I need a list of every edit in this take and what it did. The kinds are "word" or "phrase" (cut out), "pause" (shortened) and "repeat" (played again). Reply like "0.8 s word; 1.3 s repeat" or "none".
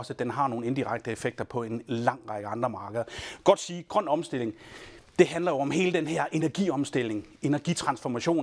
5.1 s pause